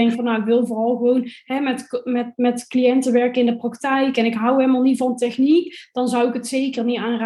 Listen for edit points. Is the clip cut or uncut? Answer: uncut